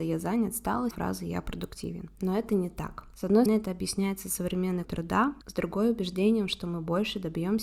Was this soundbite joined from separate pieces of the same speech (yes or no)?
yes